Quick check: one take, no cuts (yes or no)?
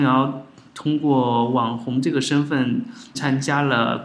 no